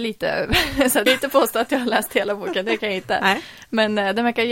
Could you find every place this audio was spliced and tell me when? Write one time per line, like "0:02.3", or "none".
0:01.1